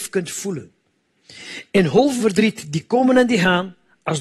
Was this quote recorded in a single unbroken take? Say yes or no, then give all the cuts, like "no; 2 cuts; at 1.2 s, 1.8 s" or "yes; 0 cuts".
no; 1 cut; at 2.2 s